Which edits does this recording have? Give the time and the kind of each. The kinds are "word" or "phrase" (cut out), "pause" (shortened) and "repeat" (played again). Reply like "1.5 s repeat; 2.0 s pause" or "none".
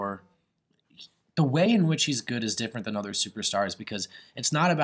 none